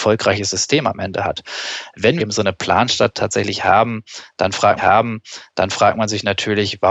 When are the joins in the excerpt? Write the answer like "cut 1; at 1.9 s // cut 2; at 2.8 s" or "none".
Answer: cut 1; at 2.2 s // cut 2; at 4.8 s